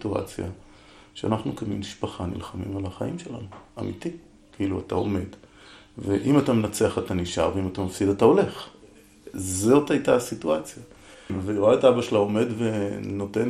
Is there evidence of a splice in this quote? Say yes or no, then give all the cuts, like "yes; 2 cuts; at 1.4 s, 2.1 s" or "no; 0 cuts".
no; 0 cuts